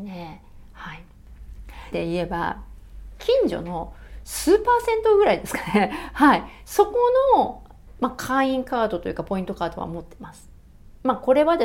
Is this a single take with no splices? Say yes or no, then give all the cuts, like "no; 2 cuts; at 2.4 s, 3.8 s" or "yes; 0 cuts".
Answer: no; 1 cut; at 1.9 s